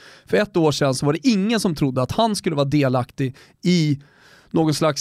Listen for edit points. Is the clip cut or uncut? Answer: uncut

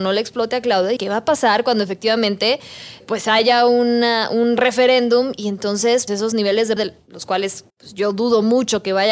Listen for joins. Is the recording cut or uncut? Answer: cut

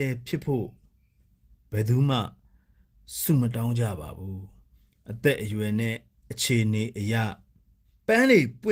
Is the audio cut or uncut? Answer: uncut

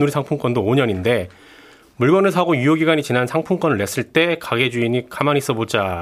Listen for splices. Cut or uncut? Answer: uncut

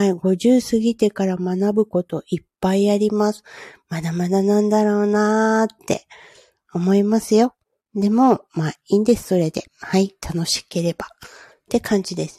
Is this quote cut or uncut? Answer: cut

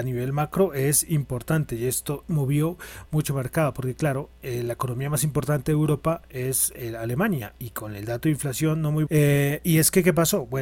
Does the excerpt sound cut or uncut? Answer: cut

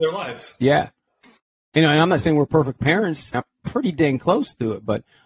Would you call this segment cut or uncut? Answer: cut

